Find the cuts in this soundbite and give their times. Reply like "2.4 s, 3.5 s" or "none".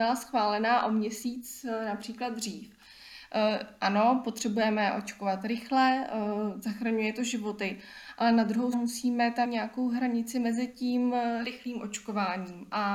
8.7 s, 9.4 s, 11.4 s